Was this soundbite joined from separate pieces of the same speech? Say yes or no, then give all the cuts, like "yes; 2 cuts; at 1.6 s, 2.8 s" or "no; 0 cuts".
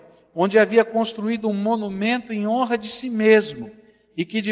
no; 0 cuts